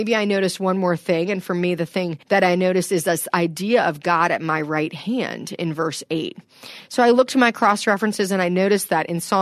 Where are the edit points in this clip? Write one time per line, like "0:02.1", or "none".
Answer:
0:02.2